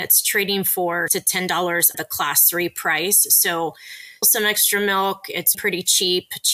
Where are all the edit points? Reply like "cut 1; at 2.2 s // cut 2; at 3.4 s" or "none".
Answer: cut 1; at 1.1 s // cut 2; at 1.9 s // cut 3; at 4.2 s // cut 4; at 5.5 s

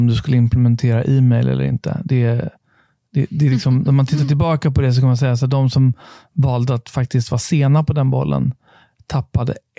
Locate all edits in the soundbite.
none

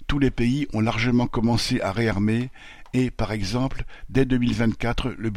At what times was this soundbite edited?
none

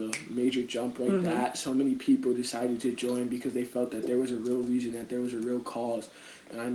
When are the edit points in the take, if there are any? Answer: none

